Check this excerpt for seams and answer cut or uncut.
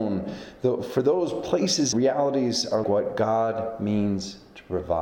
cut